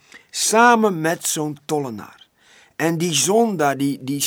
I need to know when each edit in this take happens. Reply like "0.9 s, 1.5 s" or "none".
none